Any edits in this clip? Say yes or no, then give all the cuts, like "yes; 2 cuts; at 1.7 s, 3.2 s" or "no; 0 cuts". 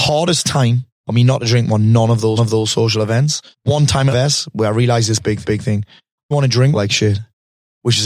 yes; 7 cuts; at 0.9 s, 2.4 s, 3.5 s, 4.1 s, 5.4 s, 6.3 s, 6.7 s